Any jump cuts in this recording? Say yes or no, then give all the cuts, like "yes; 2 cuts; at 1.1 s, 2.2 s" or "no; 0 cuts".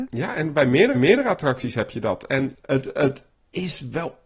yes; 2 cuts; at 0.9 s, 3.3 s